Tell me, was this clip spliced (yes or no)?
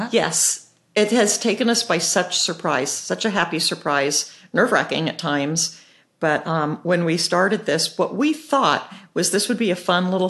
no